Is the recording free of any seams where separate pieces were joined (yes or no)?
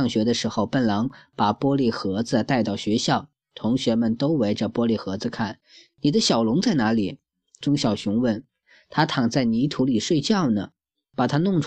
no